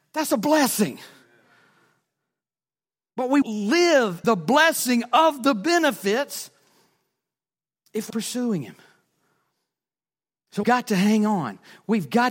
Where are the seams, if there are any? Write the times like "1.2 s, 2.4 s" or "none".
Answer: 3.4 s, 4.2 s, 8.1 s, 10.6 s